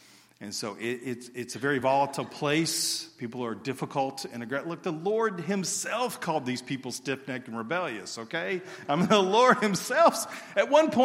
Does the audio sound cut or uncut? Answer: uncut